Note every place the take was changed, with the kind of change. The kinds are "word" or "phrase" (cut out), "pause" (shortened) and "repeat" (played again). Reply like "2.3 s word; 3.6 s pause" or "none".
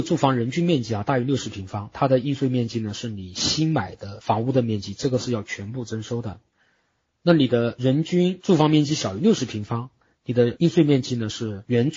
none

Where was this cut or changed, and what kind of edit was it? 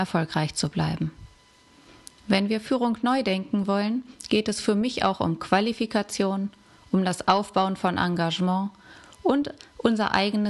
none

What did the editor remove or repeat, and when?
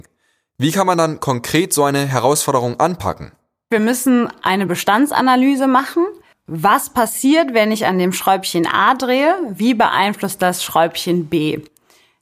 none

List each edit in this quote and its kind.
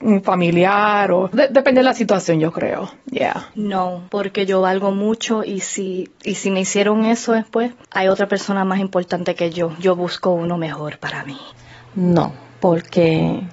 1.3 s word

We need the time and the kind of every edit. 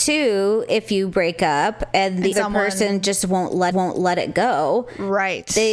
2.3 s word; 3.7 s repeat

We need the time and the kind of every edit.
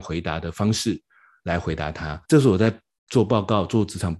2.2 s pause

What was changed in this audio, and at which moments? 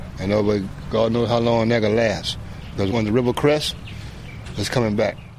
none

